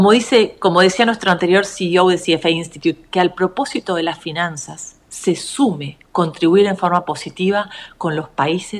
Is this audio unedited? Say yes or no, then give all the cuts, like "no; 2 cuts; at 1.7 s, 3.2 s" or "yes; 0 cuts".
no; 1 cut; at 6.0 s